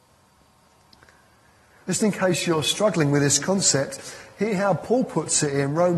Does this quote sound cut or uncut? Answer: uncut